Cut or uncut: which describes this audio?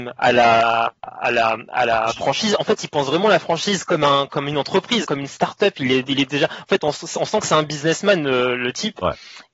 cut